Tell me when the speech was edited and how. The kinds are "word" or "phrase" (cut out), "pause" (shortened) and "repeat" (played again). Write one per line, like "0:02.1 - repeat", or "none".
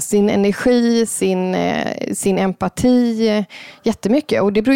none